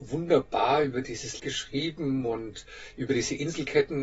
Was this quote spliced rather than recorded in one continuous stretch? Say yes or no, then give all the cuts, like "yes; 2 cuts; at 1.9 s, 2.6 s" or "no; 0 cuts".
yes; 1 cut; at 1.4 s